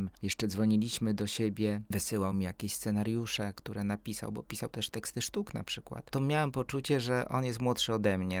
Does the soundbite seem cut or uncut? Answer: uncut